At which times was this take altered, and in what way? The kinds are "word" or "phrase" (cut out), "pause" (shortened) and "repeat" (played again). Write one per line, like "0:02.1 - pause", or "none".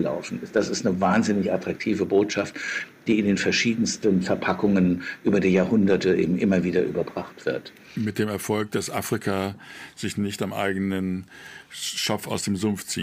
none